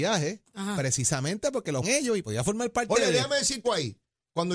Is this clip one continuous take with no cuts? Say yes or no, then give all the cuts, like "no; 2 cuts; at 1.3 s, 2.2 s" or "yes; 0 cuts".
no; 3 cuts; at 1.8 s, 2.2 s, 3.6 s